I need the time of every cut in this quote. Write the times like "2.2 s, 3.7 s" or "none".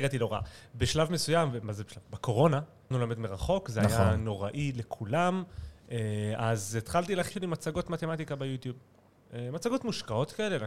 2.9 s, 7.3 s

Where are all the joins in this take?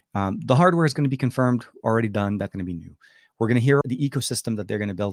2.5 s, 3.8 s

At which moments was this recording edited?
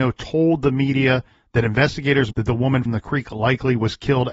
2.3 s, 2.9 s

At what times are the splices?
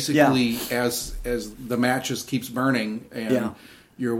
1.5 s

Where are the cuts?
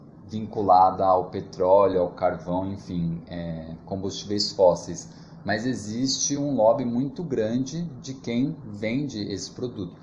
none

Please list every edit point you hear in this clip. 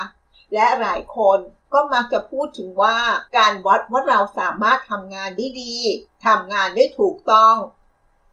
3.3 s, 6.1 s

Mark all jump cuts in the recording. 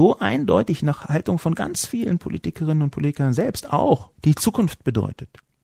4.1 s

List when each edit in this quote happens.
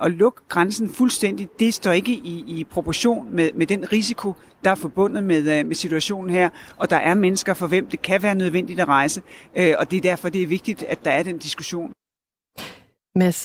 none

